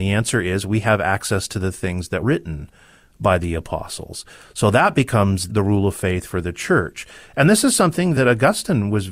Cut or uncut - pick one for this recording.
cut